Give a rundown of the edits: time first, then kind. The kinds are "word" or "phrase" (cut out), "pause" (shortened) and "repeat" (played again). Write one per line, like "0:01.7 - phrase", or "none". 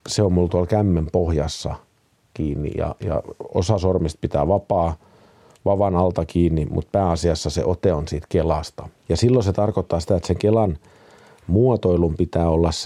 none

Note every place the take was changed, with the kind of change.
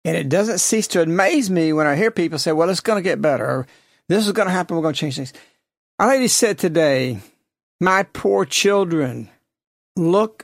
none

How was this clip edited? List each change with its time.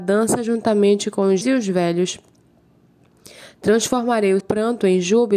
0:01.4 - word
0:04.4 - word

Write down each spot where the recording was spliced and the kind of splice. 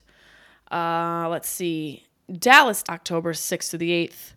0:02.8 - word

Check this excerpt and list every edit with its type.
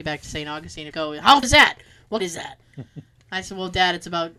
0:00.9 - phrase
0:01.4 - word
0:02.2 - phrase
0:02.6 - pause

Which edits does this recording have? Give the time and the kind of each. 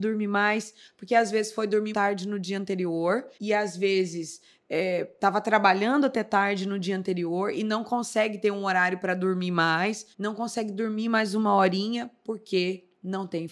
0:01.9 - word
0:03.3 - pause
0:10.1 - pause

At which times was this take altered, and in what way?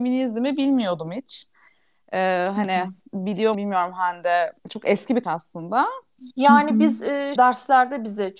0:03.5 - word
0:04.6 - pause
0:05.2 - word
0:07.4 - word

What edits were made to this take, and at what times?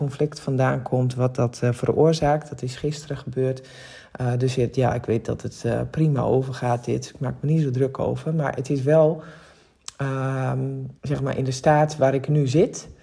0:11.0 - pause

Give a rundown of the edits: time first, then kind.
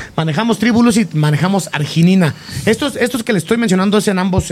none

